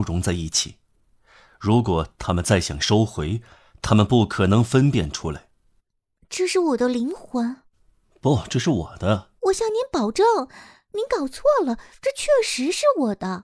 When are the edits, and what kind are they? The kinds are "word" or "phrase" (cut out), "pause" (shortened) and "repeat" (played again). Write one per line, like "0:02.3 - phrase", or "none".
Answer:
0:09.4 - pause